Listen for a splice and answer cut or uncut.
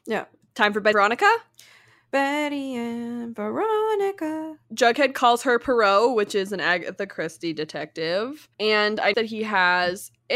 cut